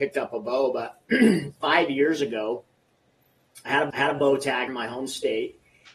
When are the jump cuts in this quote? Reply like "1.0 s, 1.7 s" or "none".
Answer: 1.5 s, 3.9 s, 4.7 s